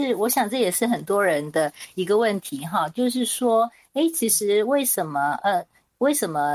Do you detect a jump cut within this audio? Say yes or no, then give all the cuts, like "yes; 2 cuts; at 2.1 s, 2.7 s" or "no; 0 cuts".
no; 0 cuts